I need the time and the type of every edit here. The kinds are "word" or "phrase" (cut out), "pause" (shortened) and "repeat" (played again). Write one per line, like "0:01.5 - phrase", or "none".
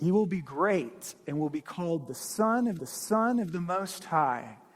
0:02.8 - repeat